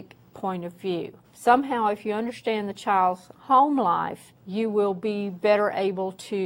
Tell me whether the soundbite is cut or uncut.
cut